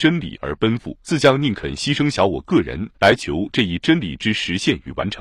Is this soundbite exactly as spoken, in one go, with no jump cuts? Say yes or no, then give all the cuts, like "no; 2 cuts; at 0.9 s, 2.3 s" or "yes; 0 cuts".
no; 2 cuts; at 1.0 s, 2.9 s